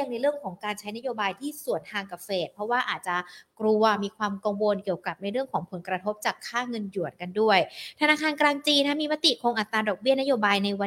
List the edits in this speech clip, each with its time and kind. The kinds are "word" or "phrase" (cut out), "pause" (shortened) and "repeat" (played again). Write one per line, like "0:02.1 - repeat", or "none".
none